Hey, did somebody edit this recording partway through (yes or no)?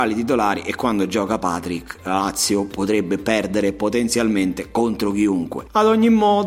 no